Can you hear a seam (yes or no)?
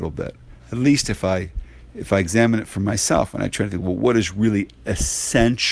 no